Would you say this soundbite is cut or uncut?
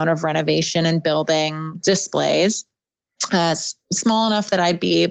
uncut